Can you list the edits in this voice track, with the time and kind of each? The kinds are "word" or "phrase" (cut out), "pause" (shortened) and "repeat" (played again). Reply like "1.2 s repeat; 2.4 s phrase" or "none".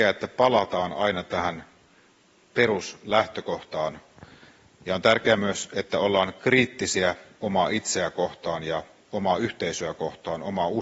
none